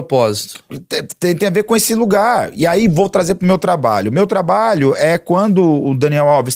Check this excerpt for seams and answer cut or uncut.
uncut